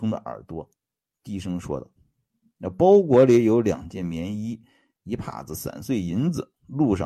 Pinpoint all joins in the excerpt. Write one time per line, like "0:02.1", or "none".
0:02.0